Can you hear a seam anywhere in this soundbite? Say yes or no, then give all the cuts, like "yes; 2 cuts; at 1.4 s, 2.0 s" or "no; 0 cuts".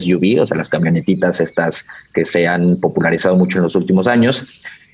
no; 0 cuts